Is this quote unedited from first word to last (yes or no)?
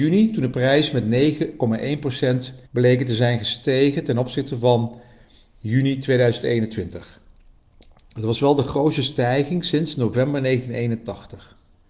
no